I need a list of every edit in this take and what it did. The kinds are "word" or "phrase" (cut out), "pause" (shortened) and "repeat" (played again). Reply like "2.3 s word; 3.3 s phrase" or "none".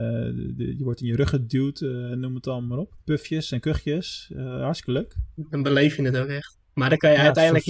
3.0 s pause